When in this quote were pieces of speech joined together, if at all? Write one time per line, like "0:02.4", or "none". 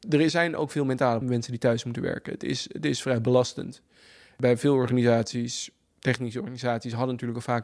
0:01.2